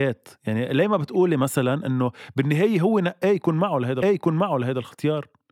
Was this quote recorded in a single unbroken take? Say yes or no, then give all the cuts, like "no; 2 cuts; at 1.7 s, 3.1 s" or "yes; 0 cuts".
no; 1 cut; at 4.0 s